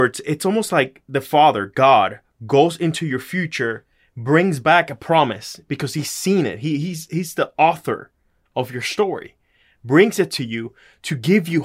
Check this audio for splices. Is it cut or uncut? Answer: uncut